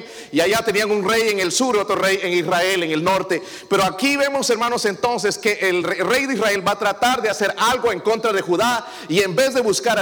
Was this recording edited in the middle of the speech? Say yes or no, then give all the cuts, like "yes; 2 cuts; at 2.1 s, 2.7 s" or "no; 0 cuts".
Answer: no; 0 cuts